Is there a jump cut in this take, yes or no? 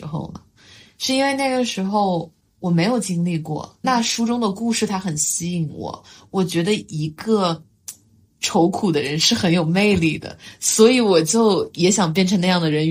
yes